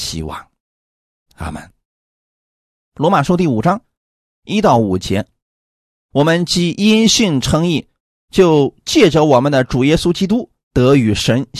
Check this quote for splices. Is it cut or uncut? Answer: uncut